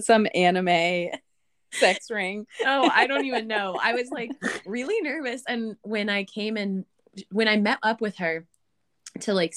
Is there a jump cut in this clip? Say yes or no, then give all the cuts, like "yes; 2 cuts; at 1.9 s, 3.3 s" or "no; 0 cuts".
no; 0 cuts